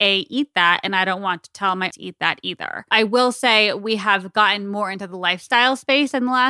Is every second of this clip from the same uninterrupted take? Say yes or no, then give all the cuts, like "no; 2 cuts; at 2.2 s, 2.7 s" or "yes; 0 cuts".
no; 1 cut; at 1.9 s